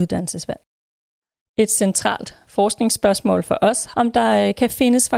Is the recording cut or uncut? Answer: cut